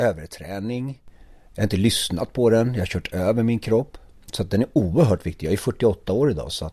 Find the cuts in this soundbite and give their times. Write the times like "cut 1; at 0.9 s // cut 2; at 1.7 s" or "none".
none

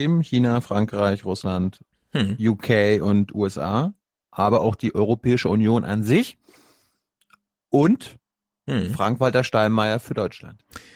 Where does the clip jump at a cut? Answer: none

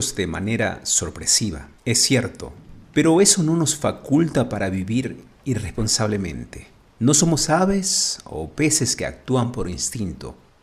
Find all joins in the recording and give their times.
cut 1; at 1.8 s // cut 2; at 2.9 s // cut 3; at 6.8 s

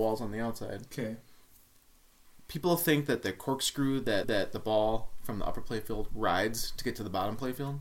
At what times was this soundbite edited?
cut 1; at 4.2 s

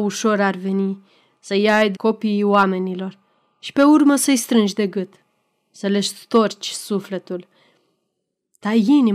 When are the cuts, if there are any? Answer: cut 1; at 1.9 s

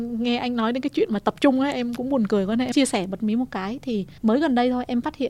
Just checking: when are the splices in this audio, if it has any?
cut 1; at 2.7 s // cut 2; at 4.2 s

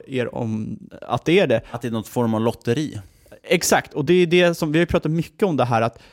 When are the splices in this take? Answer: none

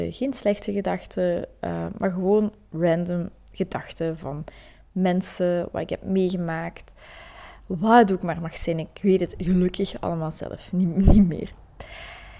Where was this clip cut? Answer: none

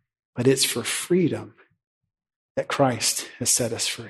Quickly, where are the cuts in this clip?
none

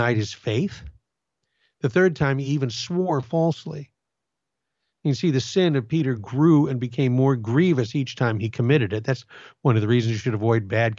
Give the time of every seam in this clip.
none

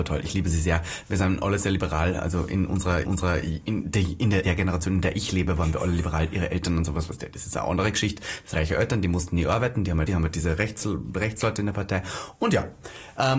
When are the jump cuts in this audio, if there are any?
cut 1; at 3.0 s // cut 2; at 4.4 s // cut 3; at 8.5 s // cut 4; at 10.1 s

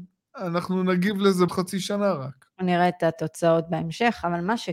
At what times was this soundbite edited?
cut 1; at 1.5 s // cut 2; at 2.5 s

